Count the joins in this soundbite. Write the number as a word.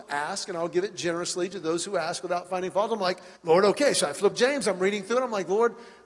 two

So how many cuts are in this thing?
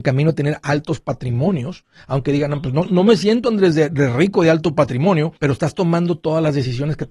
two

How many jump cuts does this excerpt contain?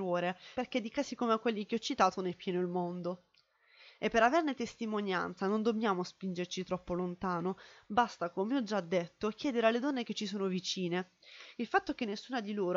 zero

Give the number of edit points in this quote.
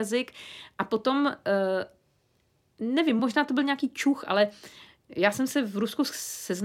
zero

